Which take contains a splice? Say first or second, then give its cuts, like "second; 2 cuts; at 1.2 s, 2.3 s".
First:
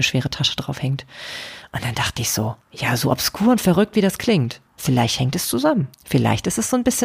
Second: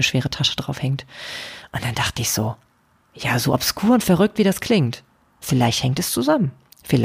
first; 3 cuts; at 2.6 s, 4.7 s, 5.9 s